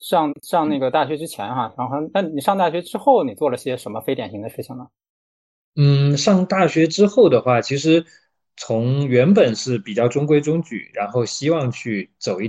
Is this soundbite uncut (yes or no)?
yes